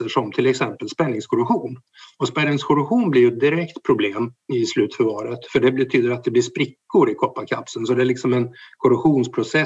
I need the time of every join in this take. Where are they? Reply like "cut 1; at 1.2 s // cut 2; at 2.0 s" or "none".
cut 1; at 4.5 s